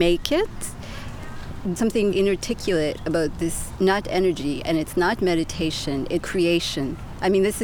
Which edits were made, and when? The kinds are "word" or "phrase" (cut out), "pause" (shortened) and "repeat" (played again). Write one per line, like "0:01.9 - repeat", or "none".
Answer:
0:01.8 - word
0:02.1 - word
0:04.0 - word
0:05.2 - word
0:06.2 - word